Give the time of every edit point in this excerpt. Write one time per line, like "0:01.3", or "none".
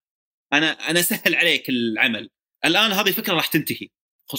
none